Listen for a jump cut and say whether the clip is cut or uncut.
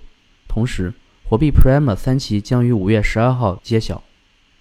uncut